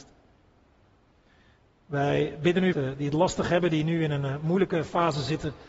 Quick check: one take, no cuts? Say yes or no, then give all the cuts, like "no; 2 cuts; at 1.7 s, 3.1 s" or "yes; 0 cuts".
no; 1 cut; at 2.7 s